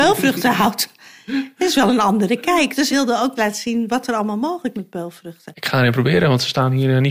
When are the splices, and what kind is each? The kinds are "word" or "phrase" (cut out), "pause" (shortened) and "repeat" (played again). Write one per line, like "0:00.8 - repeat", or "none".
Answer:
0:02.9 - word
0:03.4 - word
0:04.7 - word

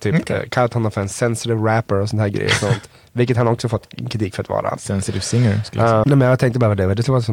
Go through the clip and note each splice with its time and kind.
0:06.0 - word

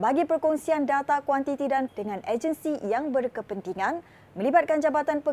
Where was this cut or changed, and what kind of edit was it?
0:01.9 - phrase

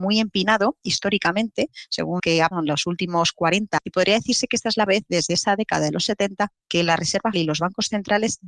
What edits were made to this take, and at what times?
0:02.2 - word
0:02.5 - word
0:03.8 - word
0:04.9 - word
0:07.3 - word

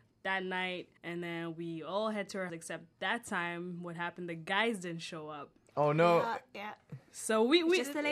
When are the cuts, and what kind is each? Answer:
0:01.0 - pause
0:02.5 - word
0:02.9 - pause

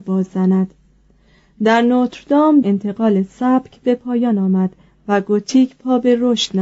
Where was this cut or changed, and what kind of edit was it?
0:02.6 - word

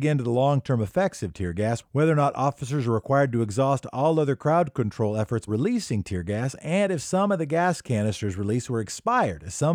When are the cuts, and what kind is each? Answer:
0:05.5 - word

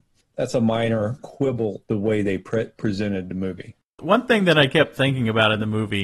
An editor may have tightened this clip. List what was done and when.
0:01.2 - word
0:01.9 - word
0:03.9 - pause

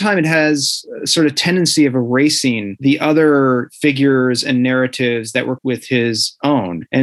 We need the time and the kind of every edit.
0:05.6 - word

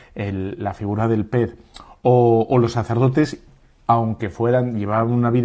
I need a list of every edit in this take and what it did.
none

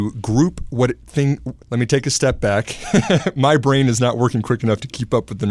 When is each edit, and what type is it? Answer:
0:01.6 - pause

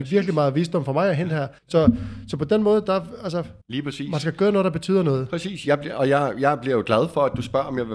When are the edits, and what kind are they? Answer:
0:01.6 - pause
0:03.6 - pause

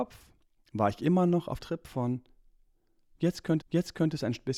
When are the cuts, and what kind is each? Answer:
0:01.6 - word
0:03.6 - repeat

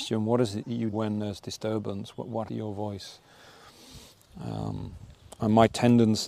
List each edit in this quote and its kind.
0:00.9 - word
0:02.5 - word

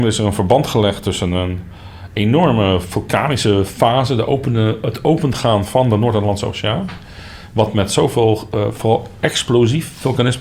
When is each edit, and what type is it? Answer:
none

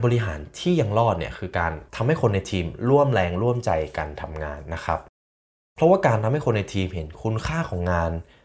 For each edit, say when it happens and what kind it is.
0:01.9 - pause

